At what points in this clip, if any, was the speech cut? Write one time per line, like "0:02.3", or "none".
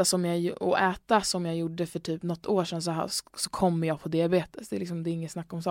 none